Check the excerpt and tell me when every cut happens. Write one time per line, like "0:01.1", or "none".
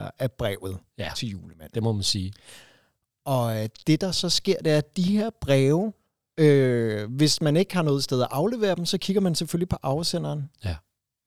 none